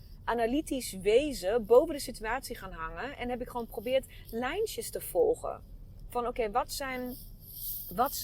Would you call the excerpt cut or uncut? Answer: uncut